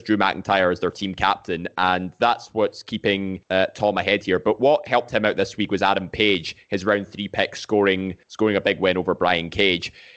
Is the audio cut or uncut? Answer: cut